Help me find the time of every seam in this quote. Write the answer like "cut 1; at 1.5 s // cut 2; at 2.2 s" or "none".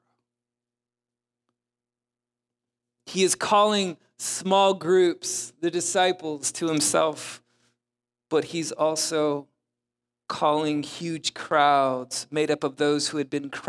none